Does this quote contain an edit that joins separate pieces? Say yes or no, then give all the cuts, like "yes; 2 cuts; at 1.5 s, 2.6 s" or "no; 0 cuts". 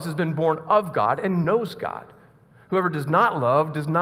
no; 0 cuts